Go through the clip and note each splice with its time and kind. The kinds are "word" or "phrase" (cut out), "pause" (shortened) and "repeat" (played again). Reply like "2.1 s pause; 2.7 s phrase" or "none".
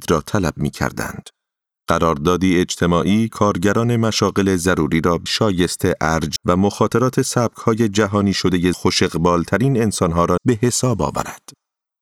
3.3 s word; 5.3 s word; 6.4 s word; 8.7 s word; 10.4 s word